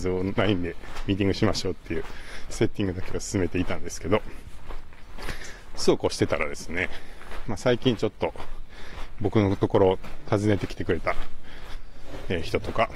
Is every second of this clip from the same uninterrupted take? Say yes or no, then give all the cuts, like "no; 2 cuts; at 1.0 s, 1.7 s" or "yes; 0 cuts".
no; 1 cut; at 9.2 s